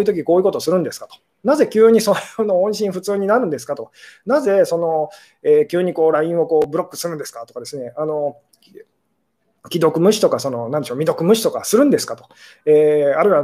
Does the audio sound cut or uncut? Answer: uncut